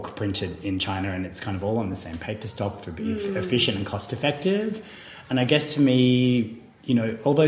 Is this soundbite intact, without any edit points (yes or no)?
yes